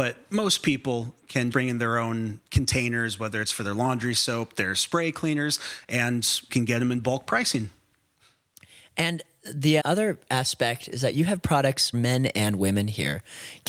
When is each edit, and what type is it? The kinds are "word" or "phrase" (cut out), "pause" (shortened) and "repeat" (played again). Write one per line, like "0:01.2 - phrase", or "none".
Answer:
0:01.5 - word
0:06.5 - word
0:09.8 - word
0:11.9 - word